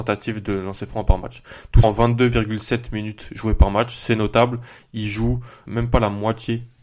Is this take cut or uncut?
cut